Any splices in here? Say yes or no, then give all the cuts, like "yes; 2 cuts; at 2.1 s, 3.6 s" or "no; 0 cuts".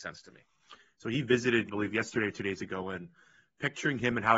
yes; 1 cut; at 1.7 s